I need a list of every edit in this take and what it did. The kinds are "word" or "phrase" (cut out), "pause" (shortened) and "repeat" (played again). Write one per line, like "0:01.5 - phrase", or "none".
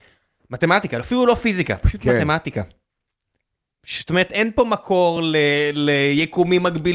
none

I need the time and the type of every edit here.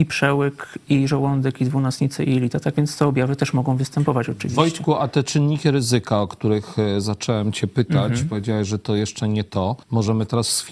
0:09.8 - pause

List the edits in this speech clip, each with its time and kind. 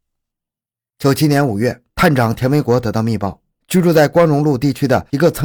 none

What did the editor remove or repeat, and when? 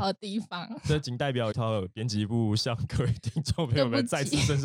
0:01.5 - word

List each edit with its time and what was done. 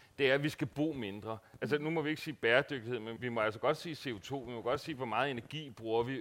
0:03.2 - word

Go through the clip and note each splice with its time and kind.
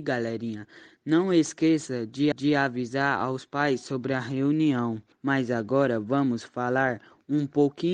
0:02.3 - repeat
0:05.1 - pause

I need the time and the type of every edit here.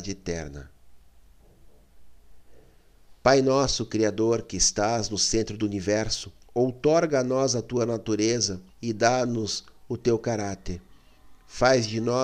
0:06.4 - pause
0:08.7 - pause

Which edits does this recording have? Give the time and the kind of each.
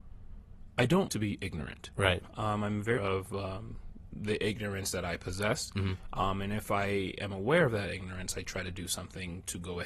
0:01.1 - word
0:03.0 - word

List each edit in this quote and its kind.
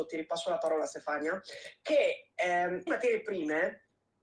0:02.9 - word

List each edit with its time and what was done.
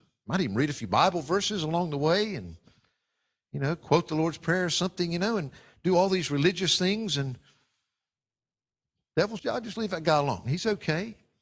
0:09.4 - word

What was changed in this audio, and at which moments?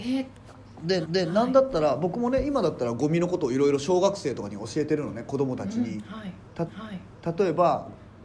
0:01.0 - repeat
0:06.7 - repeat

